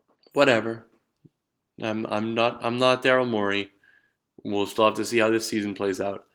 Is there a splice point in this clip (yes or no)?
no